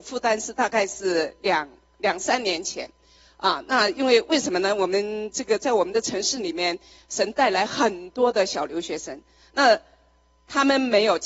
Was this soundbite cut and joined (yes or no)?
no